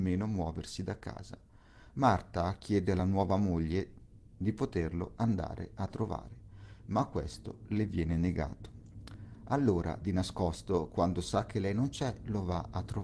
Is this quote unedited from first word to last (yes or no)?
yes